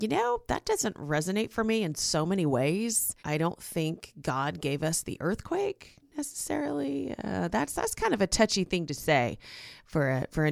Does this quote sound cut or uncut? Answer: cut